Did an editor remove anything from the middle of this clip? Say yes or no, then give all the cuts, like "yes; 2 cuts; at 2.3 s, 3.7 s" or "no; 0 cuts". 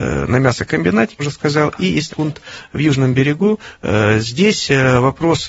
yes; 2 cuts; at 1.2 s, 2.1 s